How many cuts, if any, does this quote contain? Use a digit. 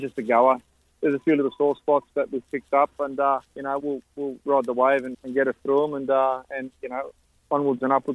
3